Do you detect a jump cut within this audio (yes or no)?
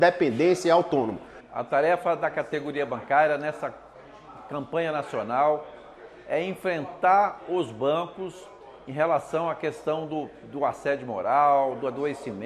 no